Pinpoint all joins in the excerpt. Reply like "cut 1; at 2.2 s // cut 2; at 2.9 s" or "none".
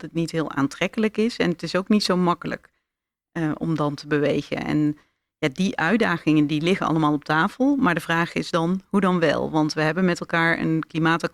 none